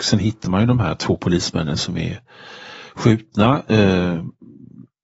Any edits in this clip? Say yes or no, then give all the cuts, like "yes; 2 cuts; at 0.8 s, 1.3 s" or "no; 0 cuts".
no; 0 cuts